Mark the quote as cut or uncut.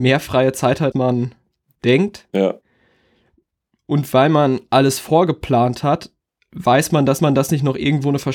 cut